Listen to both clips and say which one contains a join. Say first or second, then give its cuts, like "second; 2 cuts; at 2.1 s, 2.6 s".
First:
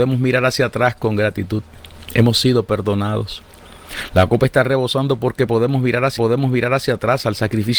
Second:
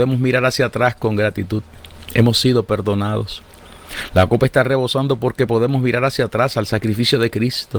first; 1 cut; at 6.2 s